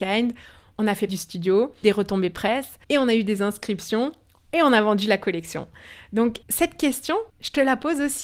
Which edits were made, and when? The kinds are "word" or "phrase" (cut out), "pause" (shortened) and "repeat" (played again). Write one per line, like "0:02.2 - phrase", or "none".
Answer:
0:01.1 - word
0:01.8 - phrase
0:02.8 - pause
0:06.4 - pause
0:07.3 - pause